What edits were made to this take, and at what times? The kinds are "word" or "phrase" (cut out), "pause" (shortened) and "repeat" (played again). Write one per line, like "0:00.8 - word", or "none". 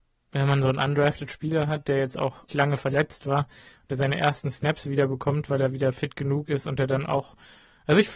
0:02.5 - word